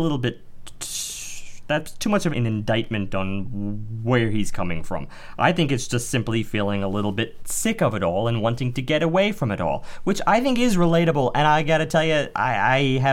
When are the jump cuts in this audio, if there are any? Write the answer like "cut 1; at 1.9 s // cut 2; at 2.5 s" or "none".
cut 1; at 2.3 s